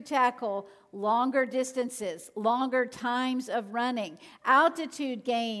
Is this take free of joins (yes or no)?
yes